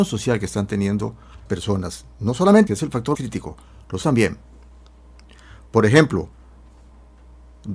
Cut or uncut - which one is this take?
cut